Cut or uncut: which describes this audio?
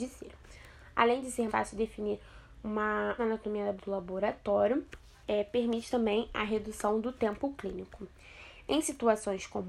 cut